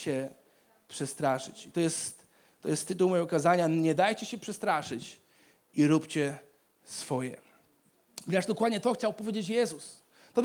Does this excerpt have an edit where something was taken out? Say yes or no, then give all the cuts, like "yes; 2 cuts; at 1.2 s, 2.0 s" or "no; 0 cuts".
no; 0 cuts